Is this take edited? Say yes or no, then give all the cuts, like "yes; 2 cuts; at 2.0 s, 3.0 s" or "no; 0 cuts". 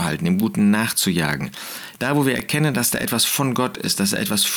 no; 0 cuts